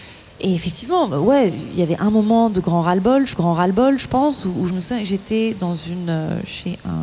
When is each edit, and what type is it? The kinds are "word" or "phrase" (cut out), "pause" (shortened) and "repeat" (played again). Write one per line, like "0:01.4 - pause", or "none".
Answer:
0:03.4 - repeat